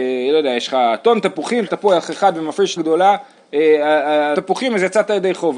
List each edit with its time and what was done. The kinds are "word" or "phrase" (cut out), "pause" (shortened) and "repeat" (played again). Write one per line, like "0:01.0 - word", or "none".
0:01.7 - word
0:02.8 - word
0:04.3 - word